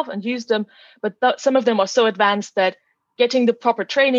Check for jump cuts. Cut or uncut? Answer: uncut